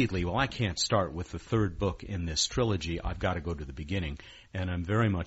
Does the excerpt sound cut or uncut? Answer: uncut